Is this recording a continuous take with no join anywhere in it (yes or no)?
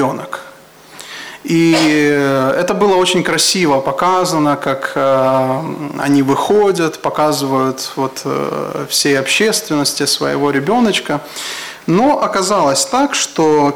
yes